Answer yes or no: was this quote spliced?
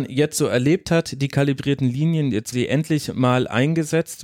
yes